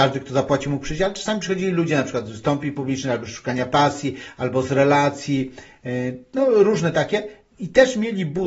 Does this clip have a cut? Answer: no; 0 cuts

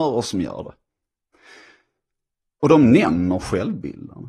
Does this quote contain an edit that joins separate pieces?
no; 0 cuts

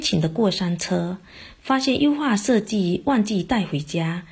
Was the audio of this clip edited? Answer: no; 0 cuts

